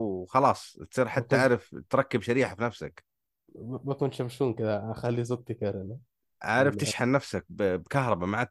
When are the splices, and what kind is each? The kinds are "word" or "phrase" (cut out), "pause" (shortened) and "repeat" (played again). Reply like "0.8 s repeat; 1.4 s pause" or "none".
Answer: none